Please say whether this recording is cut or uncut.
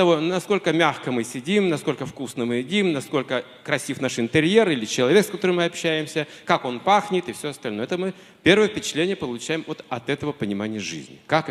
uncut